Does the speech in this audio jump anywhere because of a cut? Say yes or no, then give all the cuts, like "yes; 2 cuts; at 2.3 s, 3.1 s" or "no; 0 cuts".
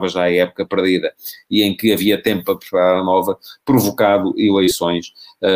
no; 0 cuts